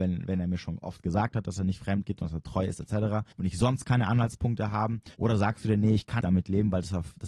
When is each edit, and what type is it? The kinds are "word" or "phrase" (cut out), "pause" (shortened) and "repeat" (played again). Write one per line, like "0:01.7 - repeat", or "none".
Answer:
0:03.3 - pause
0:05.1 - pause
0:06.2 - word